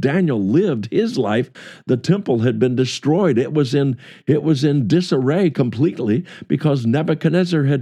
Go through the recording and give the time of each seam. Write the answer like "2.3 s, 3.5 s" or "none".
none